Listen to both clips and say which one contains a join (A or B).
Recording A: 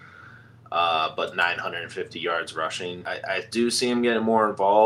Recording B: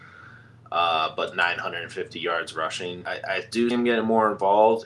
B